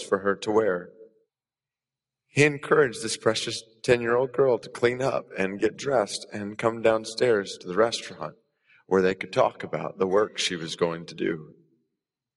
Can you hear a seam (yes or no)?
no